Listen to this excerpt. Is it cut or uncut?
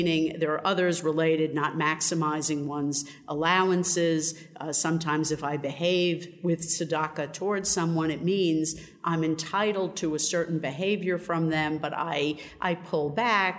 uncut